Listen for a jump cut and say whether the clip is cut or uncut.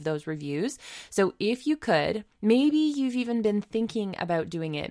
uncut